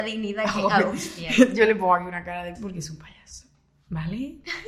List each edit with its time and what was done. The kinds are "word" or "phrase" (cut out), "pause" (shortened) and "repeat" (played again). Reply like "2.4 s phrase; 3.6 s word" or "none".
2.6 s word